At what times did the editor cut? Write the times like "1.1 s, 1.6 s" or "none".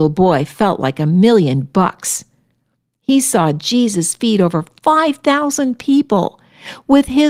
none